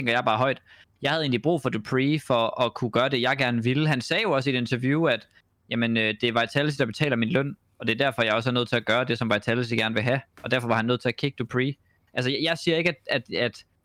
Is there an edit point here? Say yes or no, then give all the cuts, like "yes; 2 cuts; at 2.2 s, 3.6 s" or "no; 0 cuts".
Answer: no; 0 cuts